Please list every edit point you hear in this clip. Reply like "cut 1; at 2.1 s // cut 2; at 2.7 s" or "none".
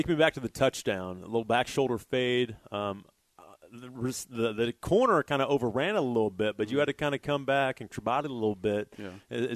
cut 1; at 7.9 s